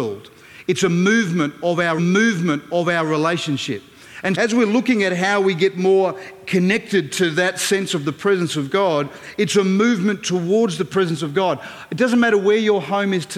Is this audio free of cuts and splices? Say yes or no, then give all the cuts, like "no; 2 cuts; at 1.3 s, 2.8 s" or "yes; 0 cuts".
no; 2 cuts; at 2.0 s, 4.3 s